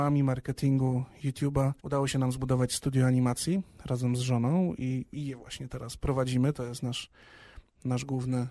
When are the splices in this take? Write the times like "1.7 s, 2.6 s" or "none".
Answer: 1.8 s